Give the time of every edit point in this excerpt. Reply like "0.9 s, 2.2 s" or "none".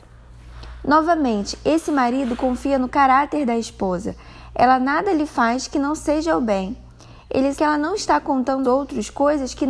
7.6 s, 8.6 s